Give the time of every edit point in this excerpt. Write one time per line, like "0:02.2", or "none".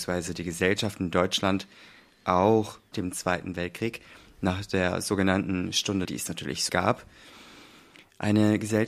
0:02.9
0:06.0
0:06.7